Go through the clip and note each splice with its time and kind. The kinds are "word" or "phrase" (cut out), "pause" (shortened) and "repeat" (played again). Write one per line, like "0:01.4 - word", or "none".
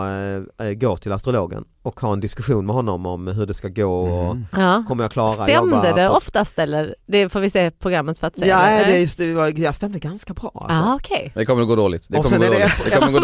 0:01.7 - pause